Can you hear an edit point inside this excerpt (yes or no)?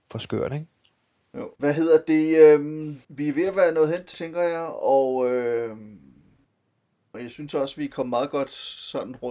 yes